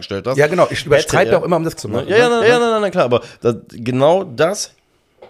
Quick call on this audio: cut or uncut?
cut